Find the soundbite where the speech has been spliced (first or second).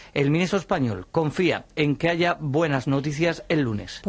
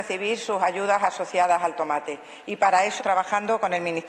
second